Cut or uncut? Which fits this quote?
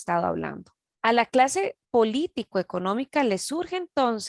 uncut